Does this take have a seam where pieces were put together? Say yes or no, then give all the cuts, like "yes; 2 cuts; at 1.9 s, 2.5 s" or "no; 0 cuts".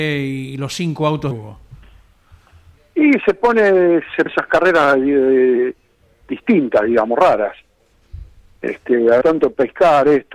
yes; 3 cuts; at 1.3 s, 4.3 s, 9.2 s